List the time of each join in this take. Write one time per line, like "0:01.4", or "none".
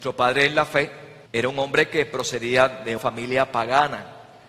0:01.3
0:03.0